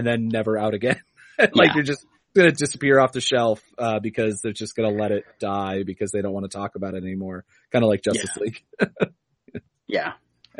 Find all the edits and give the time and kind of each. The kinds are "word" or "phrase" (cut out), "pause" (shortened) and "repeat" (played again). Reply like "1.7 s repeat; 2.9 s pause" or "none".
none